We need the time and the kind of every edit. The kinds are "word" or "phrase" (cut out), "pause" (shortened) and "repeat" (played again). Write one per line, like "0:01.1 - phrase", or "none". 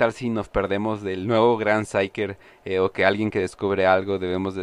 none

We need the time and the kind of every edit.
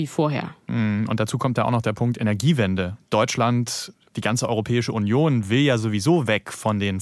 none

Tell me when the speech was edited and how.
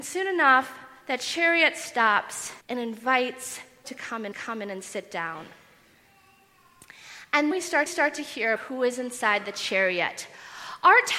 0:02.6 - pause
0:03.8 - word
0:04.3 - repeat
0:07.5 - word
0:07.9 - repeat
0:08.6 - word

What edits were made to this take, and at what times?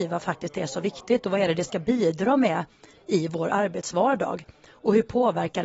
none

